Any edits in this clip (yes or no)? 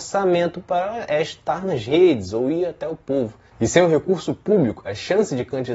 no